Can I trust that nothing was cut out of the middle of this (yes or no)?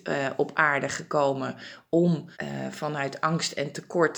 no